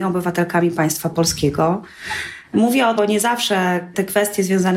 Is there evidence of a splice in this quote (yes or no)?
yes